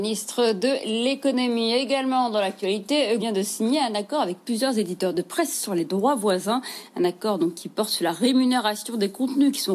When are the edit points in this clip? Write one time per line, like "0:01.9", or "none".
0:03.2